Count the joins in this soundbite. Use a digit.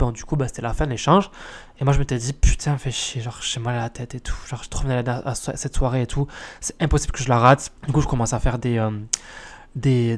1